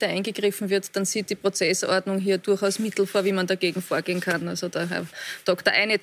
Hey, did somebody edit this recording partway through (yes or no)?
no